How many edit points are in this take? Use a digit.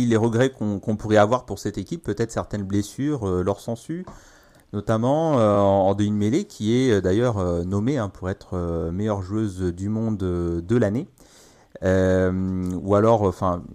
0